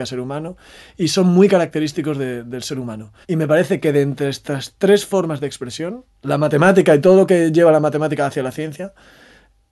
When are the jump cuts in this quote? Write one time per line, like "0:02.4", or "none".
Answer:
0:03.2